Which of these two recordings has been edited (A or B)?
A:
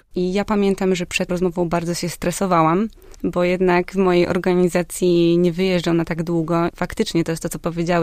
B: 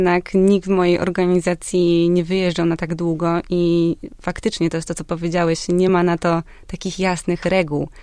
A